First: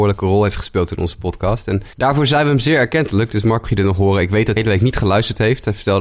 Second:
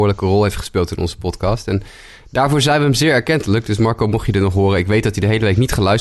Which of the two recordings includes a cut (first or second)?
first